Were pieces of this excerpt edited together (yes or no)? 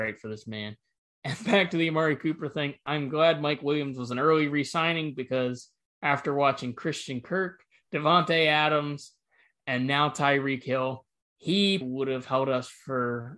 yes